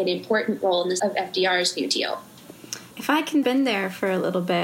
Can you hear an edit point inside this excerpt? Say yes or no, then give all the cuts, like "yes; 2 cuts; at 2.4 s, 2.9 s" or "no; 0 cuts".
yes; 3 cuts; at 1.0 s, 2.9 s, 3.4 s